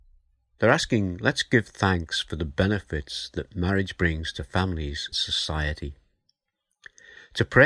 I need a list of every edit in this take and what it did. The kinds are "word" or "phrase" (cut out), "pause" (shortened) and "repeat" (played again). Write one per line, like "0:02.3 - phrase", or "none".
0:05.1 - word